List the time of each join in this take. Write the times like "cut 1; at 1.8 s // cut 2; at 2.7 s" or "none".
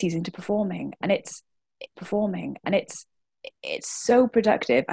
cut 1; at 1.9 s